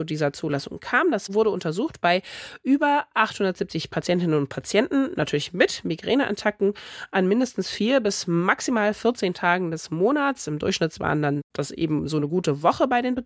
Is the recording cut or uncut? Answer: uncut